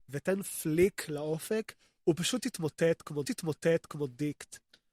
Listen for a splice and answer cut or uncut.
cut